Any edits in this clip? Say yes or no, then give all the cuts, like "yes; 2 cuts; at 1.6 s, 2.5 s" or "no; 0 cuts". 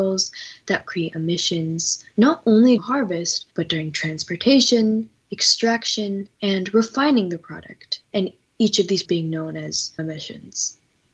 yes; 6 cuts; at 2.8 s, 3.5 s, 6.3 s, 8.0 s, 9.1 s, 10.0 s